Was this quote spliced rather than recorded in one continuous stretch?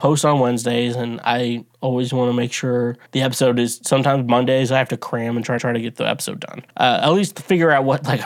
yes; 3 cuts; at 3.1 s, 5.6 s, 6.7 s

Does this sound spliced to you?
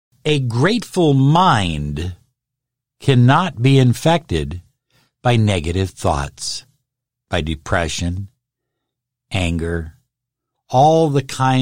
no; 0 cuts

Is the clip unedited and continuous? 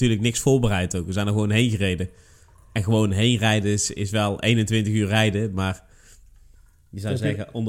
yes; 0 cuts

